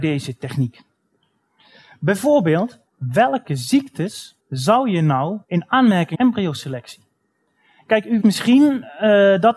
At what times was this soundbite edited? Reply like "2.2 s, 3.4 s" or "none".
2.9 s, 4.4 s, 5.4 s, 6.1 s, 8.2 s